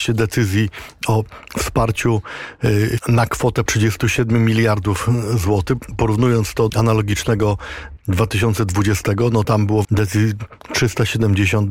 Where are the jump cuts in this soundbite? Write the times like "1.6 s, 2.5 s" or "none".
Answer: 3.0 s, 3.7 s, 6.7 s, 8.0 s, 9.4 s, 9.8 s